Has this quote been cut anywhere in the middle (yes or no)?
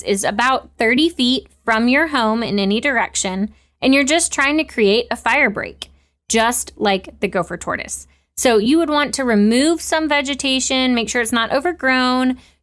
no